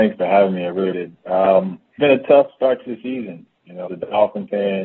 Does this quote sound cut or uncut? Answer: cut